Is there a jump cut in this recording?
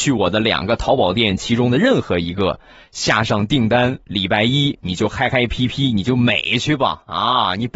no; 0 cuts

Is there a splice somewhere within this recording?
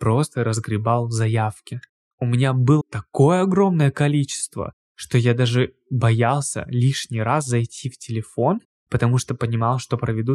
yes; 1 cut; at 2.8 s

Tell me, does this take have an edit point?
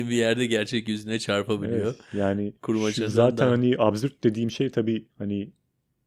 yes; 2 cuts; at 2.6 s, 5.1 s

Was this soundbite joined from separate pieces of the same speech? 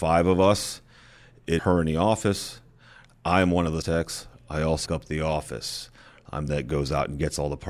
yes; 4 cuts; at 1.6 s, 3.8 s, 4.9 s, 6.5 s

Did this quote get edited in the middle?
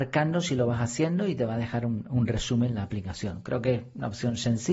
no; 0 cuts

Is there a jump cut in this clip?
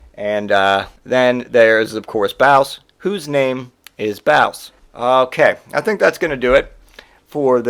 yes; 3 cuts; at 1.0 s, 3.8 s, 4.8 s

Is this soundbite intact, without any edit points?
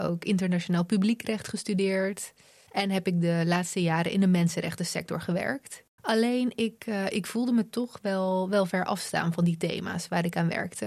yes; 0 cuts

